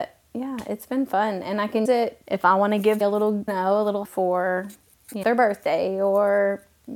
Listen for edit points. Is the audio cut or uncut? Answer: cut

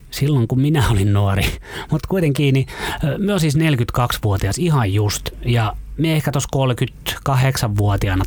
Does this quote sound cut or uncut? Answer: uncut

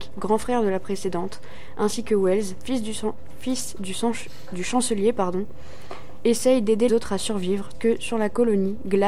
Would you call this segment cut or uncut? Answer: cut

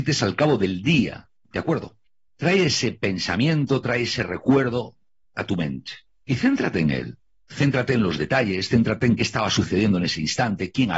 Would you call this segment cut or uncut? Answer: uncut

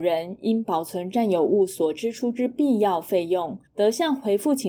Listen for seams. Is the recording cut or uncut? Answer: cut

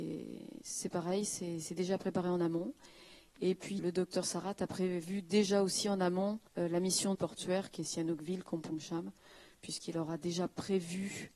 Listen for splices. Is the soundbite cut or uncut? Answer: cut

